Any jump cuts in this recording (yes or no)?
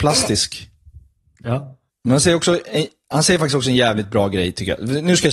no